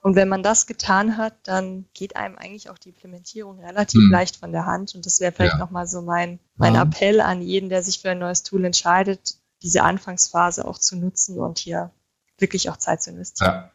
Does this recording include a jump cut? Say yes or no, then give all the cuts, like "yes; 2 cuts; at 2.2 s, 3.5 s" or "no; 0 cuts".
yes; 2 cuts; at 1.9 s, 6.5 s